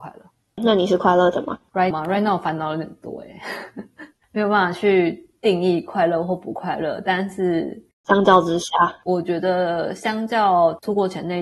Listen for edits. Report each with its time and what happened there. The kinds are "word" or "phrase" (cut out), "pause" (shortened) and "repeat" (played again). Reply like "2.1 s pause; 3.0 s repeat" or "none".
1.9 s word